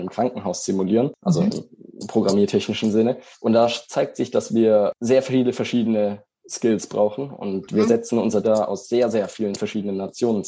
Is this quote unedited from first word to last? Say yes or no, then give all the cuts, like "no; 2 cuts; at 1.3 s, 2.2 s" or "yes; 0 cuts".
no; 2 cuts; at 3.3 s, 8.4 s